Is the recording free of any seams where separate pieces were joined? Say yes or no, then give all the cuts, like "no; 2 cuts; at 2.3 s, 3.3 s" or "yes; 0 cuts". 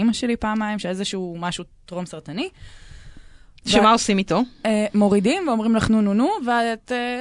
yes; 0 cuts